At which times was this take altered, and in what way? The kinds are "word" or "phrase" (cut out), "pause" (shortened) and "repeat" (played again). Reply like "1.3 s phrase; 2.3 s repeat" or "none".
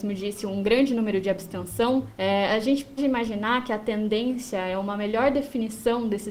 3.0 s word